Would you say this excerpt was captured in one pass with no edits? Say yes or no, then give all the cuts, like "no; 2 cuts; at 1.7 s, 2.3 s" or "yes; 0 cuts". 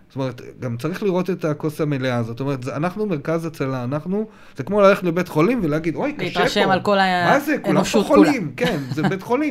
yes; 0 cuts